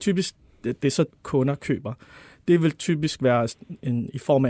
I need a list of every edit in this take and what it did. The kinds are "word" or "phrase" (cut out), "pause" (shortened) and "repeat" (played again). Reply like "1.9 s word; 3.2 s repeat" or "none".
1.1 s phrase